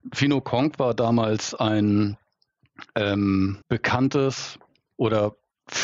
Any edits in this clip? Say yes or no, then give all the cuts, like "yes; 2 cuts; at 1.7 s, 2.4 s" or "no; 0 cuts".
yes; 1 cut; at 3.6 s